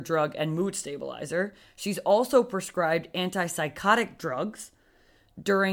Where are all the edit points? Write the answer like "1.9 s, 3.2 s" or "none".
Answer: none